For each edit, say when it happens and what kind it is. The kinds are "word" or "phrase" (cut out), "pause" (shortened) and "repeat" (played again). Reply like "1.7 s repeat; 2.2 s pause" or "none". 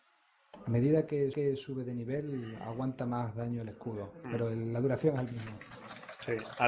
1.3 s repeat